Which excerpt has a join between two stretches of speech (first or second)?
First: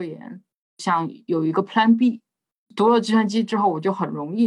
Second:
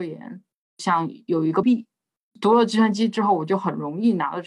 second